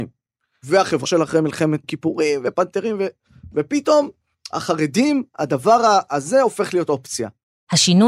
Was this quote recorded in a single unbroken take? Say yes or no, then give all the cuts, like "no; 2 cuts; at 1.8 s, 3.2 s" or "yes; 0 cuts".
no; 2 cuts; at 1.0 s, 1.8 s